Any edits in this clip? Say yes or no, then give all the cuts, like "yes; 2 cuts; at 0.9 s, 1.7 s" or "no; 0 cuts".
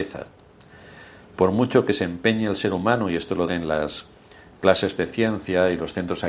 yes; 1 cut; at 3.5 s